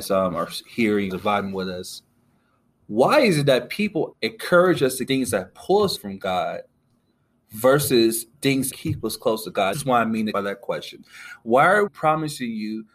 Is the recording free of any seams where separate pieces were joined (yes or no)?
no